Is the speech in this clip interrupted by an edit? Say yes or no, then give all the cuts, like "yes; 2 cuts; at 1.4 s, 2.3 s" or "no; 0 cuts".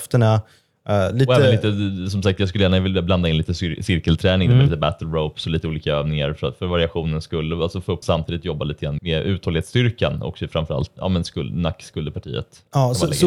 yes; 3 cuts; at 8.0 s, 9.0 s, 11.0 s